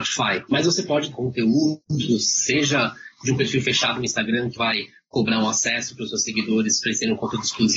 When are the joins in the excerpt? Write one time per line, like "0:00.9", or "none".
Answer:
0:01.1
0:04.6